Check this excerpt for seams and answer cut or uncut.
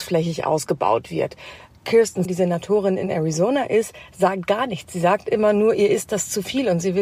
cut